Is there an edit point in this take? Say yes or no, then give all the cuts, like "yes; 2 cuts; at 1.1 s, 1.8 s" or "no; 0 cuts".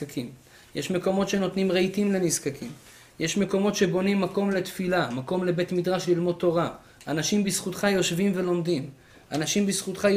no; 0 cuts